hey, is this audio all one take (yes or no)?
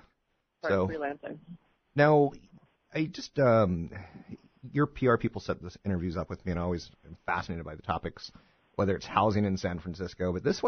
yes